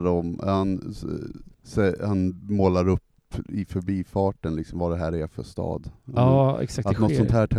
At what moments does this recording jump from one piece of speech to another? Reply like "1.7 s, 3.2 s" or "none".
1.5 s